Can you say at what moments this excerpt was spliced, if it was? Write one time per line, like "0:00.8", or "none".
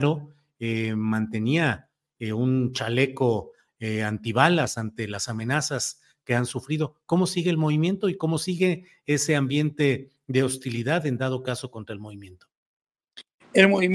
none